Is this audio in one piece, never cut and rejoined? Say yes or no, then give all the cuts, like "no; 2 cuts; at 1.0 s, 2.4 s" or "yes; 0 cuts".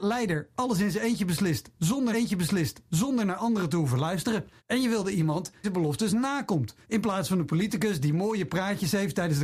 no; 4 cuts; at 2.1 s, 4.6 s, 5.6 s, 6.8 s